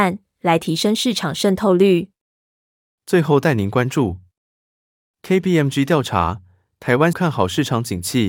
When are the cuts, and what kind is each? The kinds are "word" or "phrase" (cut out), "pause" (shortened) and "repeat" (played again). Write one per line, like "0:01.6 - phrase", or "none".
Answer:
0:07.1 - word